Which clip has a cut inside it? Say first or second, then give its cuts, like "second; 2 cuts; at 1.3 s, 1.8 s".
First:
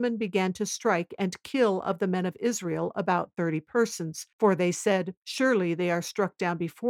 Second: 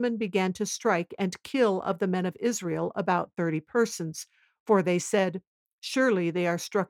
first; 2 cuts; at 4.3 s, 5.2 s